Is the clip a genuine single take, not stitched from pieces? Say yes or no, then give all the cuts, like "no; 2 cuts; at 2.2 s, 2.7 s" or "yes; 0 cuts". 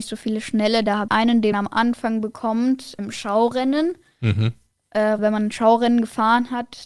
no; 4 cuts; at 1.1 s, 1.5 s, 3.0 s, 5.2 s